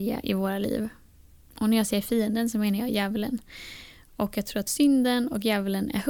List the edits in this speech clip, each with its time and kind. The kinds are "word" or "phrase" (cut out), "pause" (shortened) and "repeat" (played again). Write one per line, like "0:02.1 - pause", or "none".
none

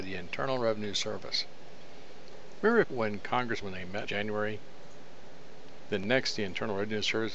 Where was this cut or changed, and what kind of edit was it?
0:02.8 - phrase
0:03.6 - phrase
0:04.1 - word

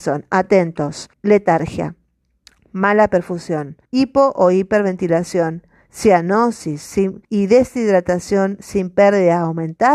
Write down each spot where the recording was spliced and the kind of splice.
0:01.1 - pause
0:03.8 - pause
0:07.2 - pause

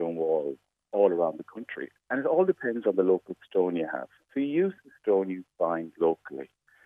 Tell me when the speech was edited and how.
0:04.2 - pause

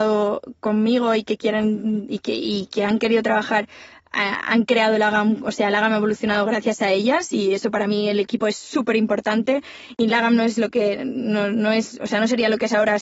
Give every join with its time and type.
none

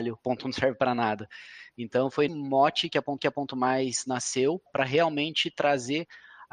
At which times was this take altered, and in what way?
0:02.3 - word
0:03.2 - repeat
0:04.7 - word

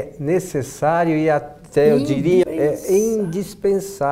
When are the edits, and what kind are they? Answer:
0:02.4 - word

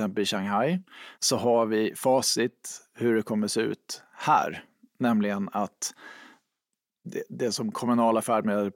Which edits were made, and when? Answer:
0:01.1 - pause

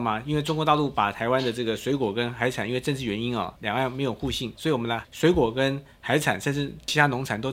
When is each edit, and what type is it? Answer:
0:04.6 - phrase

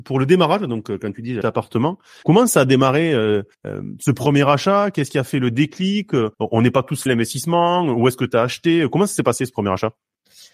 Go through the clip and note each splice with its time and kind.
0:01.4 - phrase
0:02.2 - word
0:03.5 - pause
0:06.3 - pause
0:07.1 - word

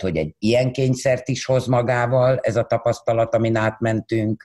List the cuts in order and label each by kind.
none

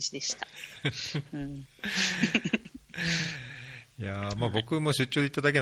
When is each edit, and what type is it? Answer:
none

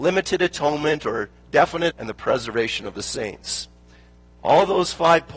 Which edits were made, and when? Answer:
0:01.9 - phrase

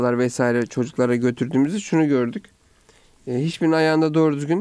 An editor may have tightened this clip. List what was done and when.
none

